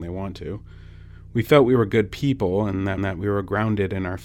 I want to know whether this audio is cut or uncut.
cut